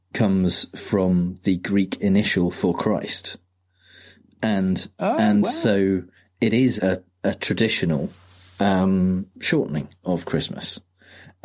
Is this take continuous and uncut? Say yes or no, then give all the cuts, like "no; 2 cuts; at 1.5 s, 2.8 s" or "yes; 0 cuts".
no; 1 cut; at 6.8 s